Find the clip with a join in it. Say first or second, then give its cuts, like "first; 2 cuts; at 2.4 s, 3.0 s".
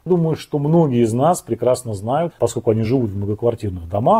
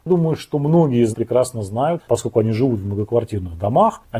second; 1 cut; at 1.1 s